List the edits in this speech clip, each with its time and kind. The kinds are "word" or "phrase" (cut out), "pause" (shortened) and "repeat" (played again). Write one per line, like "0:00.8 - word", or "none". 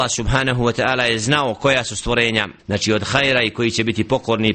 0:02.6 - pause